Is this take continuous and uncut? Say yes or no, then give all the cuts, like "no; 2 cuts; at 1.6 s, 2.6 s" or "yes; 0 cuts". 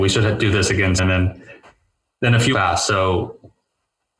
no; 2 cuts; at 1.0 s, 2.5 s